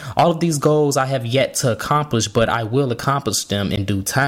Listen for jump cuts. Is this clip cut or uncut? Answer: uncut